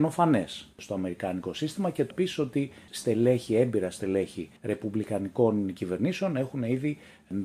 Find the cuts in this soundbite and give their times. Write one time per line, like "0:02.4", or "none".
0:02.1
0:02.9
0:04.6